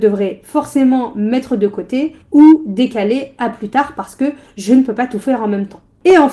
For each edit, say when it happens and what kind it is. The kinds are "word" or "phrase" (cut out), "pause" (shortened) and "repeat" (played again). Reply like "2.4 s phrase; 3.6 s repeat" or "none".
2.2 s pause